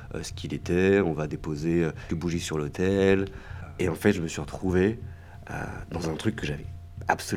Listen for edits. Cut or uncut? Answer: cut